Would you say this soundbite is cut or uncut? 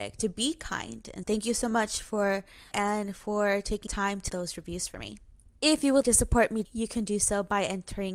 cut